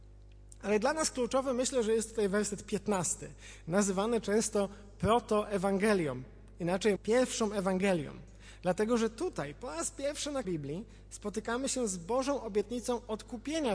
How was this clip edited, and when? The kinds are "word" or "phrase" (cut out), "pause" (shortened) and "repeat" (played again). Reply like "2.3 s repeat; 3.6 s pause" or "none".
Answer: 7.0 s word; 10.4 s word